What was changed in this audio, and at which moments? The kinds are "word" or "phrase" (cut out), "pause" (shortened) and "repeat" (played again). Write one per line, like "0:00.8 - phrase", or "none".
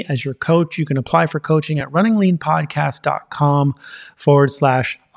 none